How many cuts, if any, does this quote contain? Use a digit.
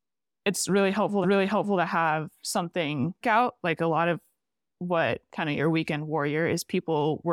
3